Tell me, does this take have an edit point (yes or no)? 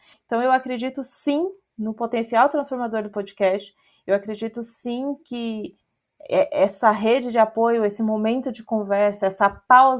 no